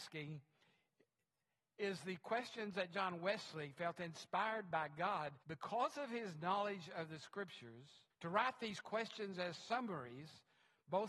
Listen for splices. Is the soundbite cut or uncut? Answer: cut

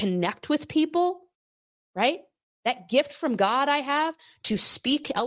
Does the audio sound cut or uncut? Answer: uncut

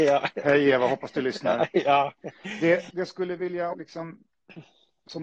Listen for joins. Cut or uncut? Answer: cut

